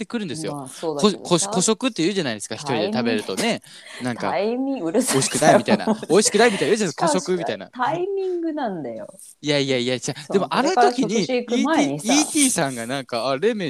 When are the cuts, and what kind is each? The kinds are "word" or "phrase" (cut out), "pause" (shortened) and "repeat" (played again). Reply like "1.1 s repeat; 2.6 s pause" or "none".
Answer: 9.4 s pause